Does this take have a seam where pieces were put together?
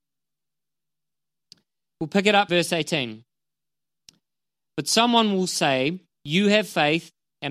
yes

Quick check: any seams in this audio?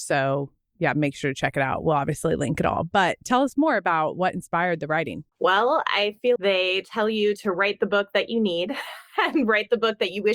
yes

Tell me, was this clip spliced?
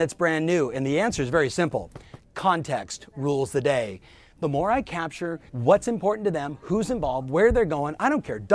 yes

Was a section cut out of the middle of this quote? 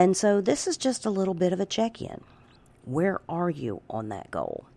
no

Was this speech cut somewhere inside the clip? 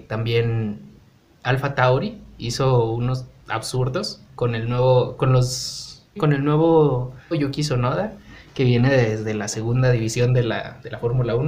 yes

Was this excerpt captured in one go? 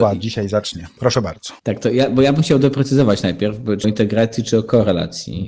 no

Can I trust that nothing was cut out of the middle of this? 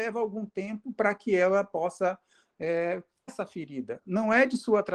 no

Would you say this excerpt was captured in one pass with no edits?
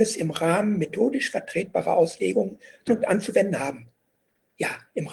no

